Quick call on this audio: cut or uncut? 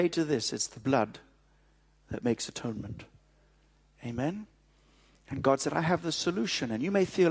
uncut